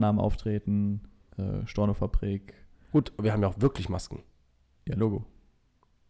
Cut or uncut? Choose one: uncut